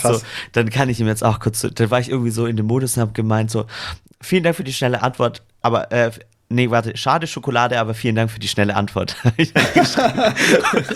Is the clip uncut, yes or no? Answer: no